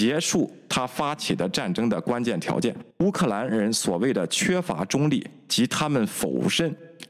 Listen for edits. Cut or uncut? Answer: cut